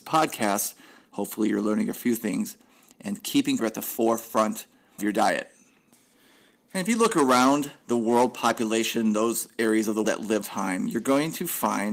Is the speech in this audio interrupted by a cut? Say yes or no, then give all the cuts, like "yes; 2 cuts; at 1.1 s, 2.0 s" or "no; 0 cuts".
yes; 4 cuts; at 3.6 s, 5.0 s, 10.0 s, 10.4 s